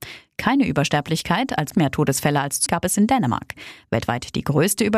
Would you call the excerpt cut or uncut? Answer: cut